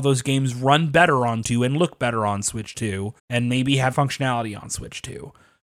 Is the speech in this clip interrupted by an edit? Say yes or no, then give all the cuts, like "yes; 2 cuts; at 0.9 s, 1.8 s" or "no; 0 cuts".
yes; 3 cuts; at 1.4 s, 3.2 s, 3.9 s